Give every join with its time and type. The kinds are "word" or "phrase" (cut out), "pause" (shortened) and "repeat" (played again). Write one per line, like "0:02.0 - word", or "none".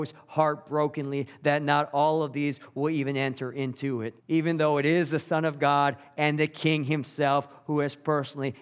0:04.2 - pause